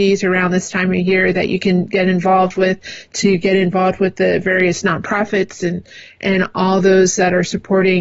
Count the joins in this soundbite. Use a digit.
0